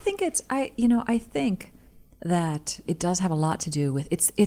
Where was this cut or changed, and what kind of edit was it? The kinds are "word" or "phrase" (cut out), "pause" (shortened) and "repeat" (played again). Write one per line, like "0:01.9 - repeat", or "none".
0:02.9 - word